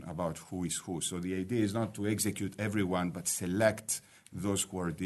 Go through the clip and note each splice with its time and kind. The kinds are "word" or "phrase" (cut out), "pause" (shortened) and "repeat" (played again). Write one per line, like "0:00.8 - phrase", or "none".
none